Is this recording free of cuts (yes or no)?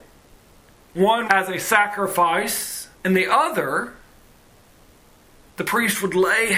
no